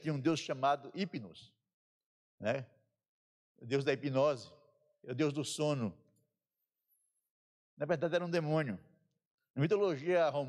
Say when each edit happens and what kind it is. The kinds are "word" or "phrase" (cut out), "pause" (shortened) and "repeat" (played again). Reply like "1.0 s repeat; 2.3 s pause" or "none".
none